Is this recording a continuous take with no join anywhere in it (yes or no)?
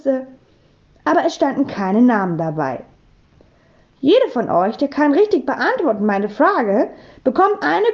yes